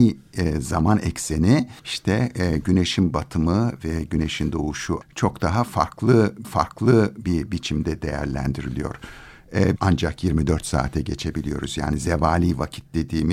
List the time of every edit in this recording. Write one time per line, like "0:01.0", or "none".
0:01.8
0:05.0
0:06.4
0:09.8